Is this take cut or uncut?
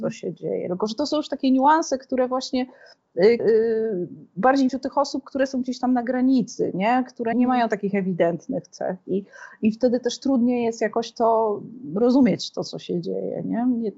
cut